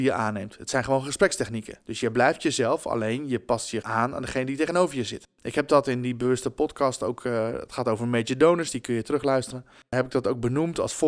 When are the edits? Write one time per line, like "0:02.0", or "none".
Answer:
0:01.8
0:03.8